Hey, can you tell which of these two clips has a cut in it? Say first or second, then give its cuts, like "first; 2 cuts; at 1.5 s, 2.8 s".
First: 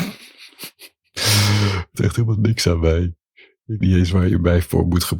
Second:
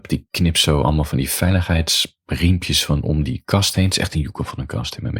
first; 2 cuts; at 1.9 s, 3.8 s